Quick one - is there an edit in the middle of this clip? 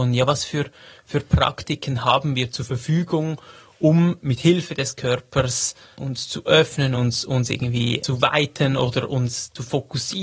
no; 0 cuts

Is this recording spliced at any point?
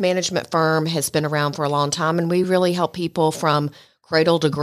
no; 0 cuts

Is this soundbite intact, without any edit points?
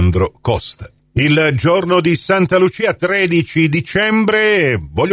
yes; 0 cuts

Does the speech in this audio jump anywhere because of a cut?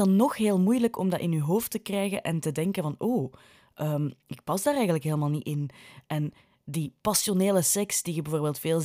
no; 0 cuts

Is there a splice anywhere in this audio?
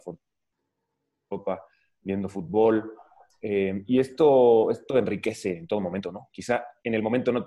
no; 0 cuts

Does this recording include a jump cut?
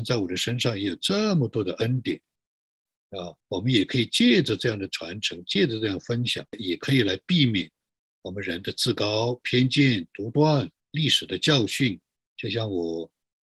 yes; 4 cuts; at 3.4 s, 6.5 s, 10.8 s, 12.2 s

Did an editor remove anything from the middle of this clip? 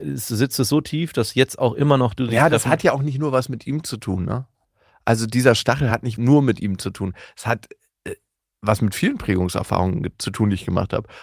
no; 0 cuts

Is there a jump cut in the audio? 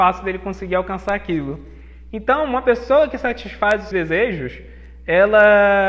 yes; 1 cut; at 3.9 s

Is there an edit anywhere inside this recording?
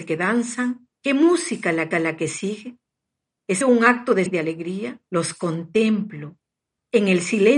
yes; 5 cuts; at 1.0 s, 1.9 s, 3.6 s, 4.3 s, 5.1 s

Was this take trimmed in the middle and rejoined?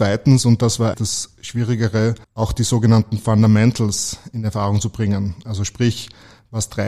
yes; 2 cuts; at 0.9 s, 2.2 s

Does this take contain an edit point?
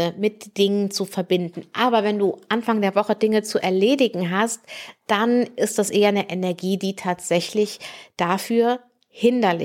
no; 0 cuts

